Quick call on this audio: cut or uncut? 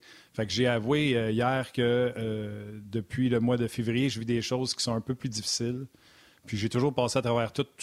uncut